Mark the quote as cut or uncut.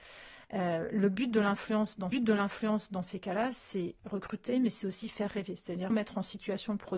cut